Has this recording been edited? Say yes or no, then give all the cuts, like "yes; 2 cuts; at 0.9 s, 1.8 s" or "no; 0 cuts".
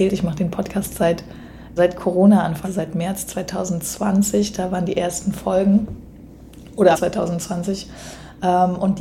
yes; 4 cuts; at 0.9 s, 1.8 s, 2.6 s, 6.9 s